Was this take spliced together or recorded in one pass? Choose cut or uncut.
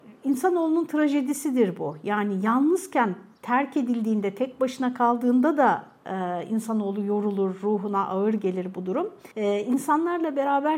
cut